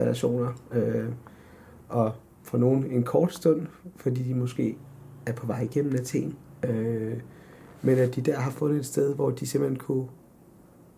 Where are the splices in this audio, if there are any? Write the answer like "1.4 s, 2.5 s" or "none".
none